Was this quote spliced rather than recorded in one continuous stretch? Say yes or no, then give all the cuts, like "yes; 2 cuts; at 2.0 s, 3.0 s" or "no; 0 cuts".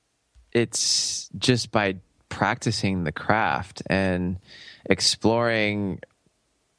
no; 0 cuts